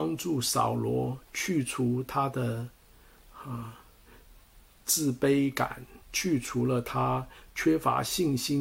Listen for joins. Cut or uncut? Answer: cut